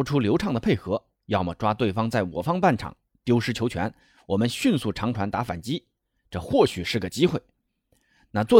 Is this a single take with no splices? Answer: yes; 0 cuts

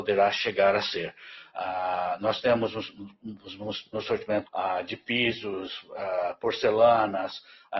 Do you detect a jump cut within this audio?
yes; 2 cuts; at 3.9 s, 4.4 s

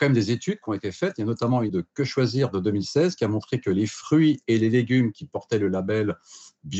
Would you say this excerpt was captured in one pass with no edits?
no; 1 cut; at 1.7 s

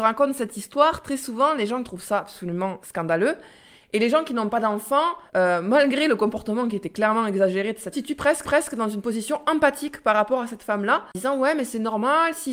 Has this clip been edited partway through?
yes; 5 cuts; at 1.8 s, 2.8 s, 5.3 s, 7.9 s, 8.4 s

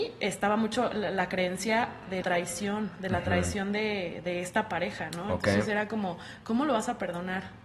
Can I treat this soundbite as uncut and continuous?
no; 1 cut; at 2.2 s

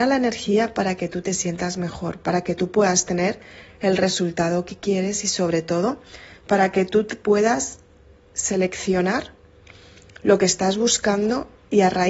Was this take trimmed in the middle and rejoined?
no; 0 cuts

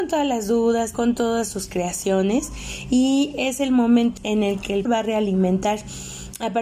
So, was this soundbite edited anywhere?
yes; 3 cuts; at 0.9 s, 4.2 s, 4.9 s

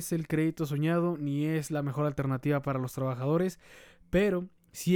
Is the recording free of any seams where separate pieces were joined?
yes; 0 cuts

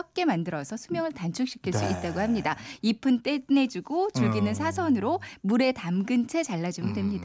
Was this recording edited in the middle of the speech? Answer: no; 0 cuts

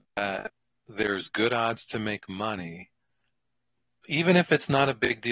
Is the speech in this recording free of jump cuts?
yes; 0 cuts

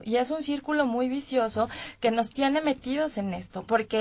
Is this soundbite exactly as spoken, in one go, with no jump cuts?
yes; 0 cuts

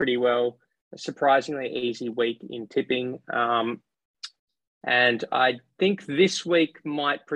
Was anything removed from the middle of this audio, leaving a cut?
no; 0 cuts

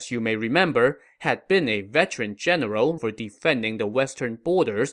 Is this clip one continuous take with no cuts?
no; 1 cut; at 3.0 s

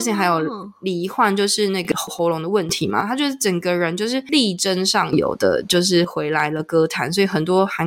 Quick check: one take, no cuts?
yes; 0 cuts

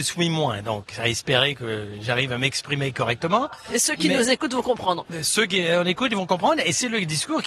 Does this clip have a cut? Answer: no; 0 cuts

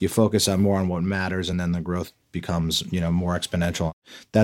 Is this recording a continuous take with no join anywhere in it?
yes; 0 cuts

